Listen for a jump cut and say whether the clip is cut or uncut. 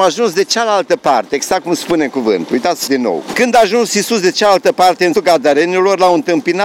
cut